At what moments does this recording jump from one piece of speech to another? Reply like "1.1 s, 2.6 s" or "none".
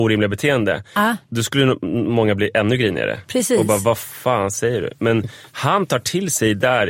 1.2 s